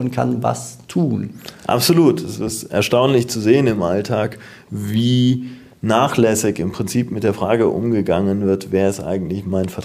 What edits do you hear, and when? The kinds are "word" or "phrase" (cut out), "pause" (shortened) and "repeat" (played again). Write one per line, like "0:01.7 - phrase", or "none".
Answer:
none